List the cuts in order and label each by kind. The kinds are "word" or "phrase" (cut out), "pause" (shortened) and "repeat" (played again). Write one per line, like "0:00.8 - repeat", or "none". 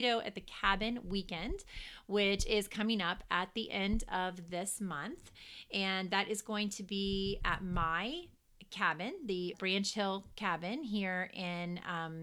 0:07.4 - word
0:09.5 - word